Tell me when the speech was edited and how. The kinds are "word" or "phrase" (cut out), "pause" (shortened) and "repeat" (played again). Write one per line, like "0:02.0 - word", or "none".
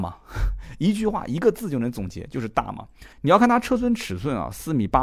0:03.1 - pause

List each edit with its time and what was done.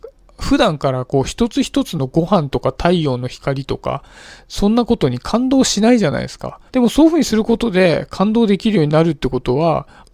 0:06.7 - pause

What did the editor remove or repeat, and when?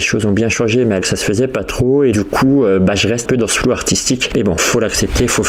0:01.0 - word
0:02.1 - word
0:03.2 - word

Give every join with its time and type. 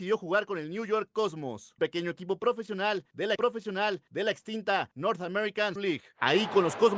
0:01.8 - word
0:03.4 - repeat
0:05.8 - word

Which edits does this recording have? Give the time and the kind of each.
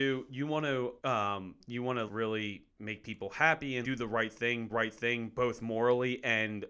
0:01.0 - pause
0:02.1 - word
0:02.7 - pause
0:03.8 - word
0:04.7 - repeat

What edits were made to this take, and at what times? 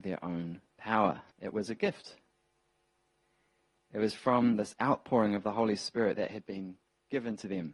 0:01.3 - pause

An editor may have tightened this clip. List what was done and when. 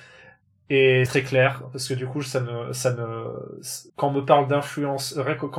0:01.1 - word
0:03.9 - pause

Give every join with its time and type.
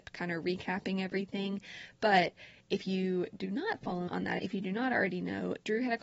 0:04.1 - word
0:04.4 - word

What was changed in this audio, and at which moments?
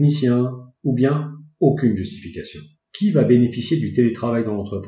0:02.8 - pause

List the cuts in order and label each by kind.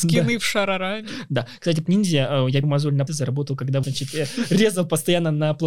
0:01.9 - word
0:02.6 - word
0:03.1 - word
0:03.8 - word

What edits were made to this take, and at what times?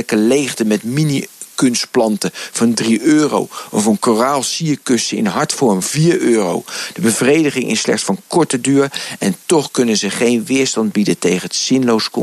0:05.8 - word

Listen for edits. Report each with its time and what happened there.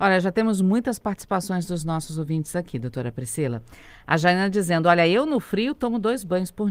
none

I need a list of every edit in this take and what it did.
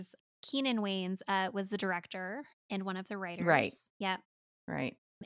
0:03.9 - pause

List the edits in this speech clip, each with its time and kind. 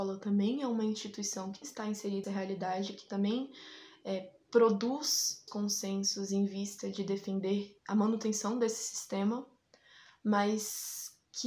0:01.6 - word
0:02.2 - word
0:05.5 - word
0:07.8 - pause

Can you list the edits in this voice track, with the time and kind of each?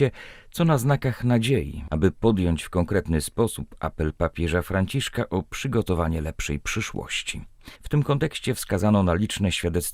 0:07.7 - pause

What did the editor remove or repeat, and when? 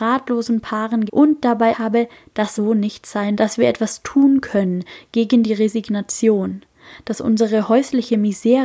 0:01.1 - word
0:01.7 - word
0:02.6 - word
0:03.3 - word

